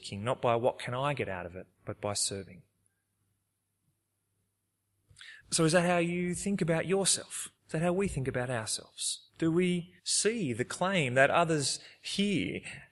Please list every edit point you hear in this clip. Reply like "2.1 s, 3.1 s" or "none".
1.7 s, 5.4 s, 7.6 s, 9.3 s, 10.0 s